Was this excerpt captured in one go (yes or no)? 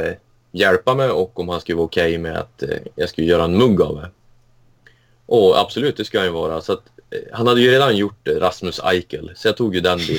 yes